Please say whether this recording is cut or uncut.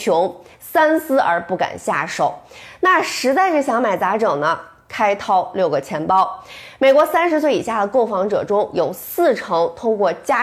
uncut